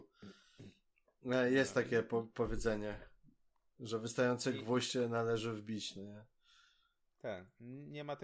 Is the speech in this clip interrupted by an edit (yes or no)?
yes